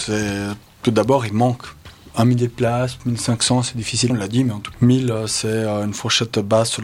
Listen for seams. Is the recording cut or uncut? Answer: cut